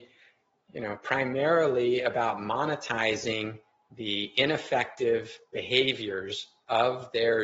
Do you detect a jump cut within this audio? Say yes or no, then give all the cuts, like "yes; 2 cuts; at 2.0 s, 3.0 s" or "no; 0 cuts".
no; 0 cuts